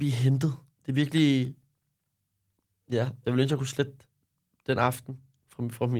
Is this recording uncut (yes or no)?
yes